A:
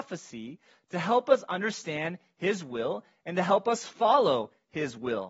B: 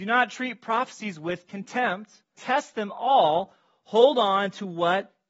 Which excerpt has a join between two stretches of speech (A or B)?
B